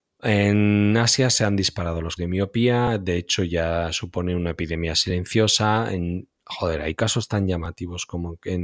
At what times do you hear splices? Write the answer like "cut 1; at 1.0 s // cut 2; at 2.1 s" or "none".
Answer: cut 1; at 2.2 s

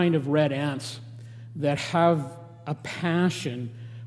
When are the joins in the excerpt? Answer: none

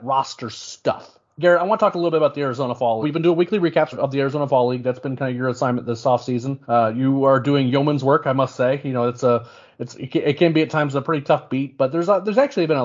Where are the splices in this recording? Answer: cut 1; at 1.3 s // cut 2; at 3.0 s // cut 3; at 3.9 s // cut 4; at 6.6 s

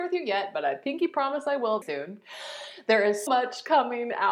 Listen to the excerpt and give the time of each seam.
cut 1; at 1.8 s // cut 2; at 3.3 s

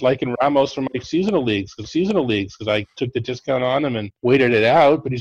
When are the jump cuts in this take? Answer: cut 1; at 1.8 s // cut 2; at 4.2 s

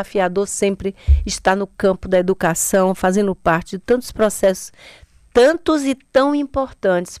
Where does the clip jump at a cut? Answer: none

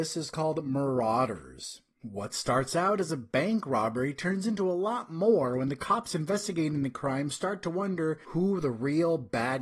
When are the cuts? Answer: none

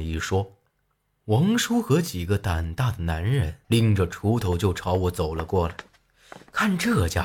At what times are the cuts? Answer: cut 1; at 3.6 s

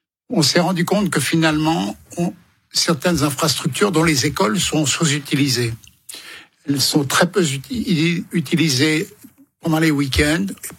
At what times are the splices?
none

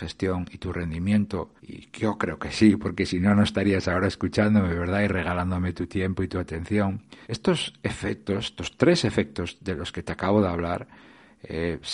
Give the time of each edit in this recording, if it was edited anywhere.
cut 1; at 1.6 s // cut 2; at 7.2 s

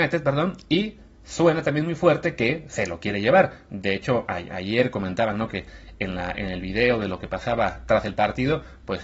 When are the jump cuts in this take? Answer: none

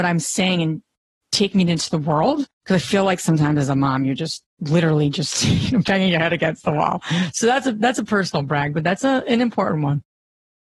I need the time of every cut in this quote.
cut 1; at 2.5 s // cut 2; at 4.5 s

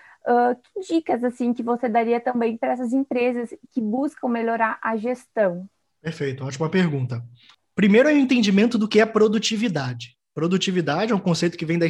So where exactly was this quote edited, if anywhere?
none

